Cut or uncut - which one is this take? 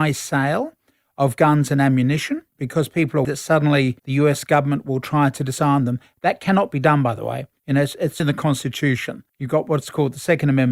cut